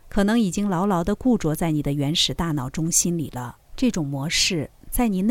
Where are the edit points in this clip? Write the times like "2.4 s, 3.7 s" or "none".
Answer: 3.6 s